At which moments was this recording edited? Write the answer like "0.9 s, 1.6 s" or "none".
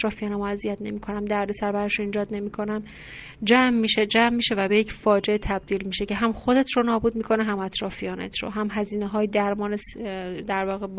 none